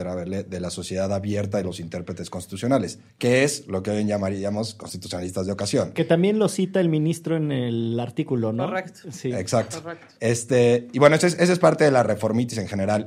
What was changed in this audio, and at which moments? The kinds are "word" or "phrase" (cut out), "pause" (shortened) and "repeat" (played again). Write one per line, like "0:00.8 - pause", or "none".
0:03.1 - pause